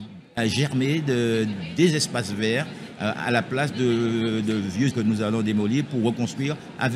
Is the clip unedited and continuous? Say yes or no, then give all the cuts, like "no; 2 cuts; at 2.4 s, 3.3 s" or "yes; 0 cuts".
no; 1 cut; at 4.9 s